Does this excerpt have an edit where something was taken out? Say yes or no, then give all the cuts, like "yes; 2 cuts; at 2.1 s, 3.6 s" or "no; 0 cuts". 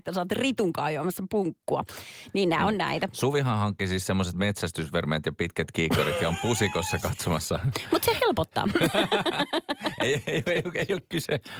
no; 0 cuts